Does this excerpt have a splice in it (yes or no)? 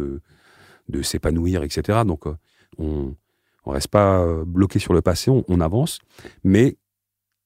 no